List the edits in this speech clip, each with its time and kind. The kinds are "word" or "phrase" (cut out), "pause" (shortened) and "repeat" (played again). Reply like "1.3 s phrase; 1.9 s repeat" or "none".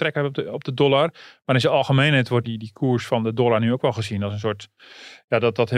2.4 s word